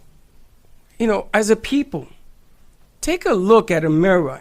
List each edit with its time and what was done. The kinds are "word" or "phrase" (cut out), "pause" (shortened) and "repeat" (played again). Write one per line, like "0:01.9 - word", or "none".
none